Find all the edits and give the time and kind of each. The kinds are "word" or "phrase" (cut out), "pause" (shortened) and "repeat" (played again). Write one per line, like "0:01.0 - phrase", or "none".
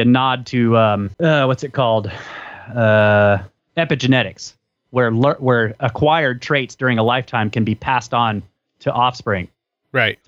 none